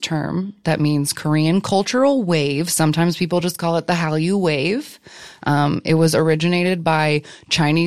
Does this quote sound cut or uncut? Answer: uncut